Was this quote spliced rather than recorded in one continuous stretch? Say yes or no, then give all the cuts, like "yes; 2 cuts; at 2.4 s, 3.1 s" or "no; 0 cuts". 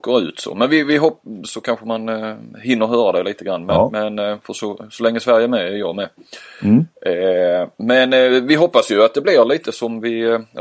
no; 0 cuts